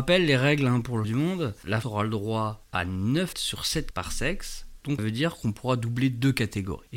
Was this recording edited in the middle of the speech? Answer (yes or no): yes